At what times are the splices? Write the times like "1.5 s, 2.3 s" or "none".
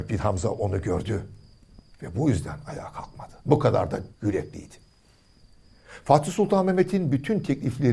3.4 s, 4.1 s